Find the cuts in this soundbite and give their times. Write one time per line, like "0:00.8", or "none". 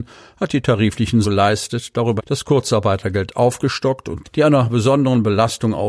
0:01.2
0:02.2
0:04.2